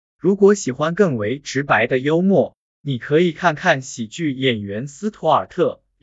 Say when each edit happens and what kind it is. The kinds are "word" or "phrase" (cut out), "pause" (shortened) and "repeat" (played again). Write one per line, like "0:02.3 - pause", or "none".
none